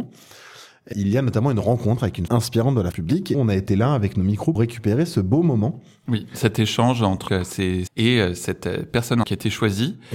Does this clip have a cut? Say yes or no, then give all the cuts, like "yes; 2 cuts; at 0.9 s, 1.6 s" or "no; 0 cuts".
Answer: yes; 8 cuts; at 0.9 s, 2.3 s, 2.9 s, 3.3 s, 4.6 s, 7.3 s, 7.9 s, 9.2 s